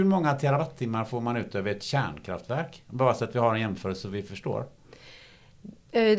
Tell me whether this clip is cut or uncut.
uncut